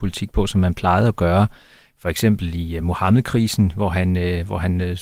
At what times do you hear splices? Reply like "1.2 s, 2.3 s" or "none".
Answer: none